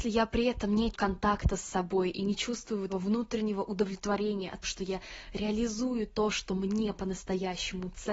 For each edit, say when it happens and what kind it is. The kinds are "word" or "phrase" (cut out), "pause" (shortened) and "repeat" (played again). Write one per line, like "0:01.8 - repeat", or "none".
0:00.9 - word
0:02.9 - word
0:04.6 - word